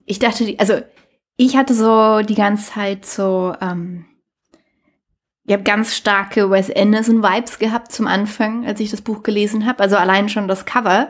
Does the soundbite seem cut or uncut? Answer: uncut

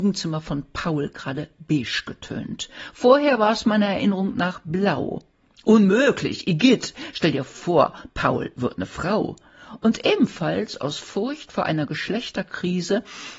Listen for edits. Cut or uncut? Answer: uncut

